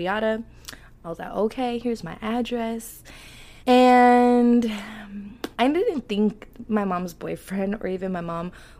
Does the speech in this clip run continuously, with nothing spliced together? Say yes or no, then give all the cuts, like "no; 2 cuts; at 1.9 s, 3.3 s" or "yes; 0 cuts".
no; 2 cuts; at 3.6 s, 5.5 s